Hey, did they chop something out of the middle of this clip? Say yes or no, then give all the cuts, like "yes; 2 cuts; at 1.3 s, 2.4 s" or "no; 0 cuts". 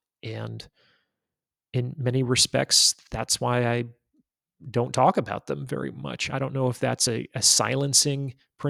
no; 0 cuts